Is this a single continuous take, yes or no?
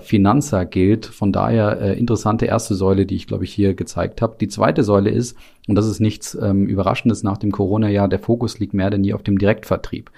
yes